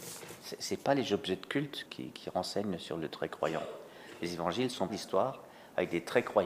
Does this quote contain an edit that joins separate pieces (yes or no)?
yes